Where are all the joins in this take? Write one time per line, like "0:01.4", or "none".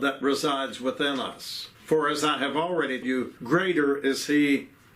0:01.7
0:03.0
0:03.4